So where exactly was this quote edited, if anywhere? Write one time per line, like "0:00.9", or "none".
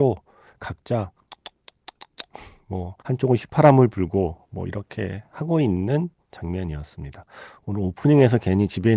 0:03.0